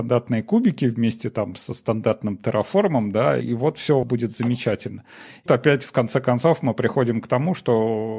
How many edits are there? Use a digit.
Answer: 3